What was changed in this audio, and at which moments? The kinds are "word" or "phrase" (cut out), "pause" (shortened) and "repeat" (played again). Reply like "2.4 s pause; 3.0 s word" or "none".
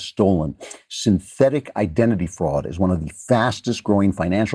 none